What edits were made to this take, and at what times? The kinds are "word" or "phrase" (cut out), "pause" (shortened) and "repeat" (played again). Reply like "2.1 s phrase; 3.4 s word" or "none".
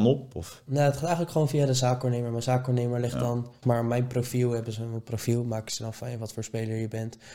3.6 s word